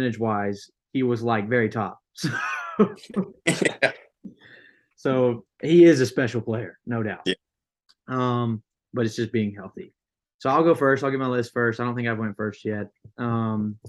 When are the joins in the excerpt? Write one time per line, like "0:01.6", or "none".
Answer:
none